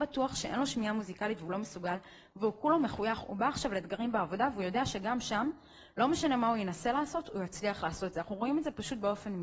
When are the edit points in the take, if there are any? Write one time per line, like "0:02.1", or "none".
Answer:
none